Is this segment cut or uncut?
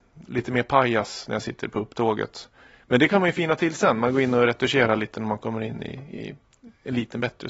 uncut